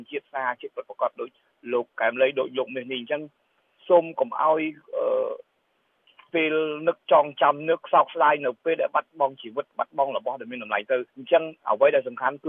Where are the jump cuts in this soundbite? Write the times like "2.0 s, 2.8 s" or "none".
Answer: 11.1 s